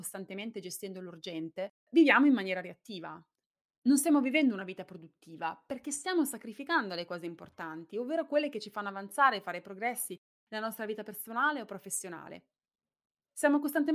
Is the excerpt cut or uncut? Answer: uncut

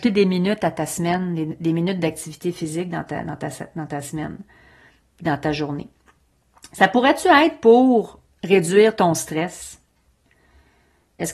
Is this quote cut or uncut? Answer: uncut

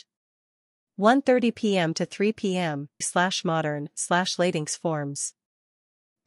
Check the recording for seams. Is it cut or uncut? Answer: cut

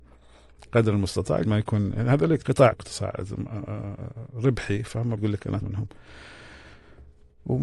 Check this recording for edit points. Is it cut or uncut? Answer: cut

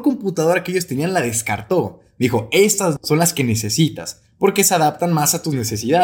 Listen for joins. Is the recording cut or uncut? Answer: cut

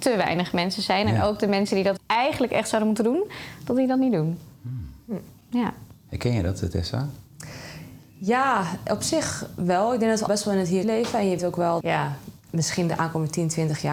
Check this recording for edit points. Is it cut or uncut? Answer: cut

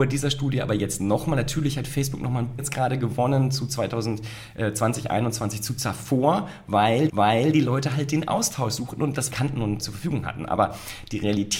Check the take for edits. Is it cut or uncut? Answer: cut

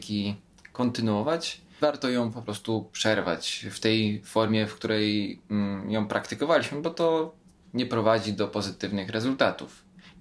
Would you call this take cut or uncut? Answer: uncut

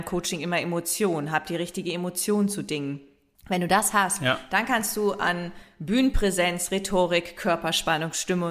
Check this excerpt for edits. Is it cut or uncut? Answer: uncut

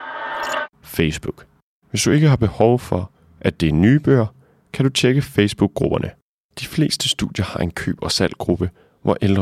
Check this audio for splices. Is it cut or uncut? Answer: uncut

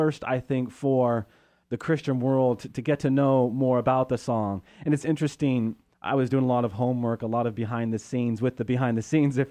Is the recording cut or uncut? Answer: uncut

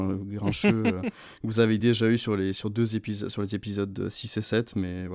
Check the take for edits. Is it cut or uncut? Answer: uncut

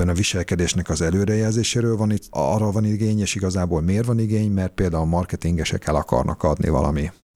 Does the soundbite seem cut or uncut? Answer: cut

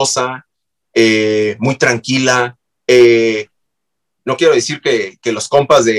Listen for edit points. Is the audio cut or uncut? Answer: uncut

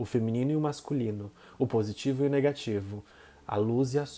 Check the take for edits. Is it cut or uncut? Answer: uncut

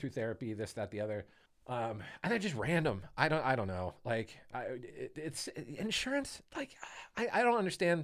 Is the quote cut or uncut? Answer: cut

